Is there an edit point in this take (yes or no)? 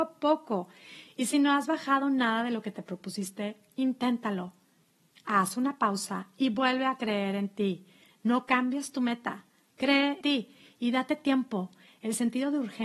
yes